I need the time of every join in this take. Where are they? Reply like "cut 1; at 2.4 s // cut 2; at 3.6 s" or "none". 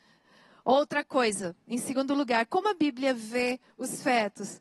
none

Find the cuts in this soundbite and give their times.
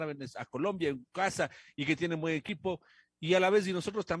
none

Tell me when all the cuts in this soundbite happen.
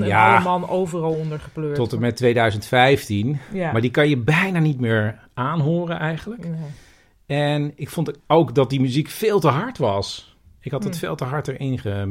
cut 1; at 8.2 s

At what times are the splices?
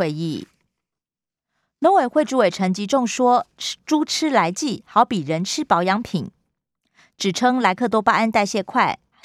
cut 1; at 0.9 s

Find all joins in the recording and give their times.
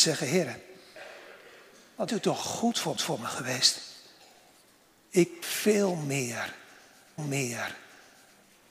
cut 1; at 2.1 s // cut 2; at 3.0 s // cut 3; at 5.4 s // cut 4; at 7.2 s

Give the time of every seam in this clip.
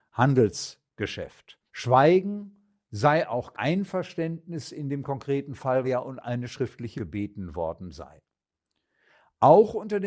cut 1; at 1.7 s // cut 2; at 3.5 s // cut 3; at 5.8 s // cut 4; at 7.0 s

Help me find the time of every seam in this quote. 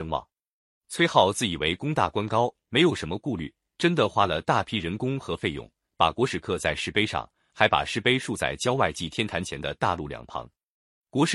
none

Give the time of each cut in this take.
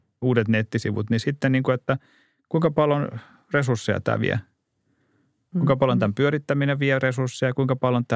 none

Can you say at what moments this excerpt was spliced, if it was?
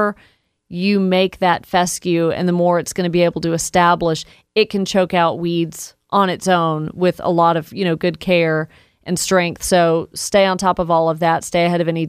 none

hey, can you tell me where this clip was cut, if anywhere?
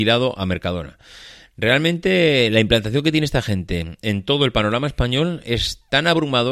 none

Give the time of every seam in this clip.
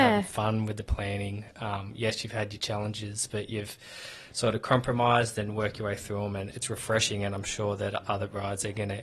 cut 1; at 6.5 s

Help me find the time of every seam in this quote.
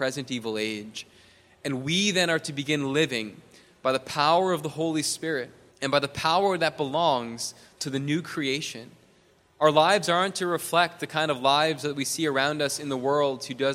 cut 1; at 5.7 s

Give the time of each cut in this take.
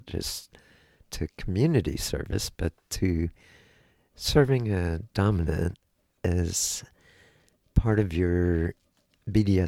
none

